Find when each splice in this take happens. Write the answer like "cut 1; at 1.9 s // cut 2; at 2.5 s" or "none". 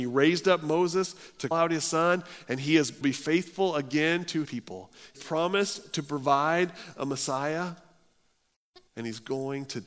cut 1; at 1.5 s // cut 2; at 3.0 s // cut 3; at 4.4 s // cut 4; at 5.1 s // cut 5; at 8.9 s